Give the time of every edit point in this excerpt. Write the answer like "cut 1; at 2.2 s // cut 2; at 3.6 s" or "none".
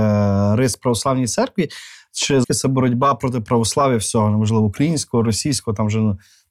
cut 1; at 2.4 s